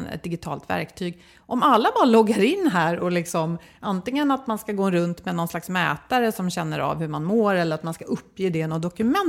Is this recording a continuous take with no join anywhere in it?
yes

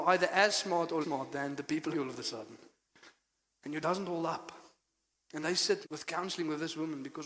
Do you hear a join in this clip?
yes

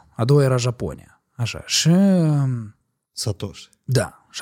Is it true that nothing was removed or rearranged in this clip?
yes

